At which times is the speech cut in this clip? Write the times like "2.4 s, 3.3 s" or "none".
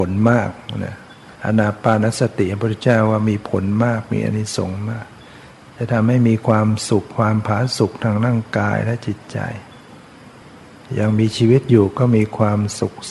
1.4 s